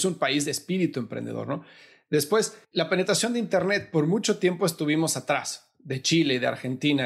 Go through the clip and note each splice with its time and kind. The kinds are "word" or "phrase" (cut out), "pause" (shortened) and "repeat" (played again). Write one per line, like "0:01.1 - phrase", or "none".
0:02.6 - pause